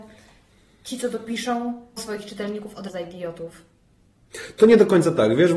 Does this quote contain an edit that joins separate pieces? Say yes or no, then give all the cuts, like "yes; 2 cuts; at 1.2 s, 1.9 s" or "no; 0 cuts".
yes; 2 cuts; at 2.0 s, 2.9 s